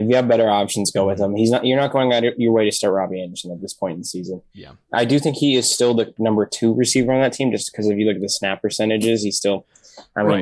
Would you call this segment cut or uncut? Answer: uncut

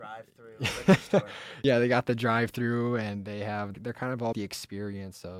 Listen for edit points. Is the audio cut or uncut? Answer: cut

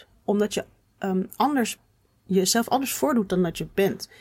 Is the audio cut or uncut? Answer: uncut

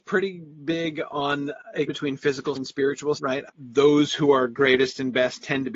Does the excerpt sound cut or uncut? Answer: cut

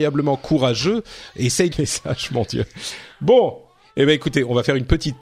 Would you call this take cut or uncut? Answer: cut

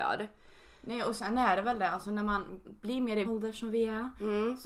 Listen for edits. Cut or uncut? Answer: cut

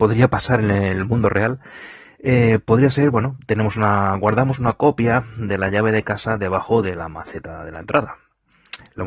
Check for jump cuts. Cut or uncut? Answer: uncut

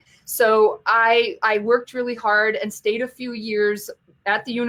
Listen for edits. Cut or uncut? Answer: uncut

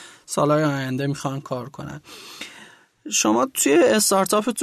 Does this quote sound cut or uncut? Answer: uncut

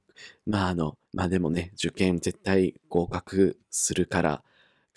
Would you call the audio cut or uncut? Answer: cut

